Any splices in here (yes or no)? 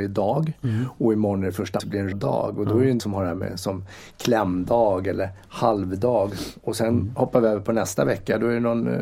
yes